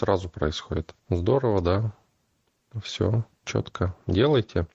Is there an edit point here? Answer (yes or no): yes